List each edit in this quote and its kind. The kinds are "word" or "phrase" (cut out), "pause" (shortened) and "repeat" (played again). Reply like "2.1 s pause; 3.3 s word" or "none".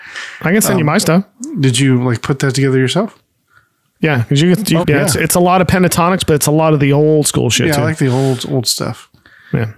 4.8 s word

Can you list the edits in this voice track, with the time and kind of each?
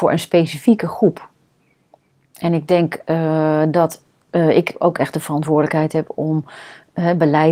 none

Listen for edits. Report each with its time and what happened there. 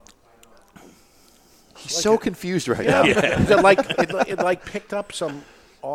3.5 s word

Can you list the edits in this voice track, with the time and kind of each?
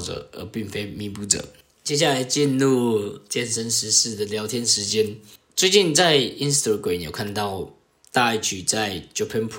none

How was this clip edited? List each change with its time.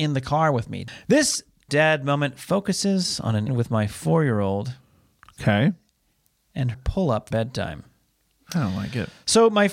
1.7 s word; 3.5 s word; 6.7 s word; 7.3 s word

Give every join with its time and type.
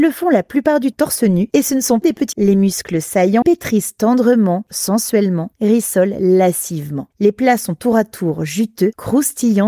0.9 s word; 2.0 s word; 2.3 s word; 3.4 s phrase; 4.7 s word

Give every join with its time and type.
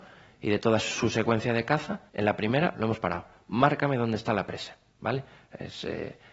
2.1 s pause; 2.7 s phrase; 4.9 s pause

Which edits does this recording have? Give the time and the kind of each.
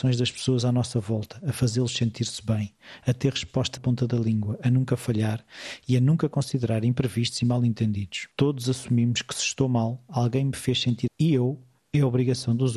3.8 s phrase; 8.3 s pause; 11.1 s word

